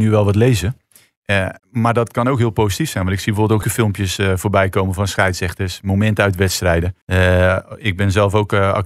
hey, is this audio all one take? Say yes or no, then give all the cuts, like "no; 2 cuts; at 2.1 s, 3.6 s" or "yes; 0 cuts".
no; 3 cuts; at 1.6 s, 3.6 s, 7.0 s